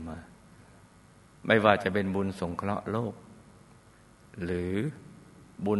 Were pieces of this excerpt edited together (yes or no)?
no